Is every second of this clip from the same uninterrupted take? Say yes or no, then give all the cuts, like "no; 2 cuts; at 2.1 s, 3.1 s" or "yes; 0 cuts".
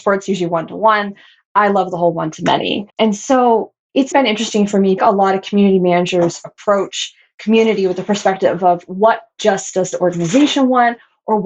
no; 3 cuts; at 2.9 s, 4.1 s, 5.0 s